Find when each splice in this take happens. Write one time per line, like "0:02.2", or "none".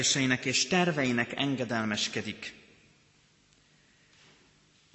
0:01.4